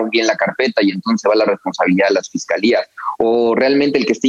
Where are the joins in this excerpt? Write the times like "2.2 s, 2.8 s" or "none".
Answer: none